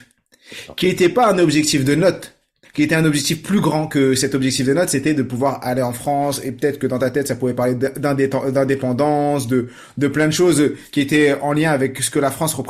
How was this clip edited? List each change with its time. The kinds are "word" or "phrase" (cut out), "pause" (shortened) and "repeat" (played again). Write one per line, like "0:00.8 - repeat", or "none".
0:02.6 - pause